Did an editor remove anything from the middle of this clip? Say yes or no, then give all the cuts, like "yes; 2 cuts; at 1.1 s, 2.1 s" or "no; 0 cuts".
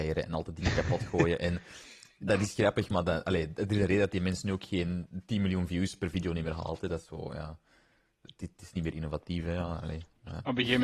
no; 0 cuts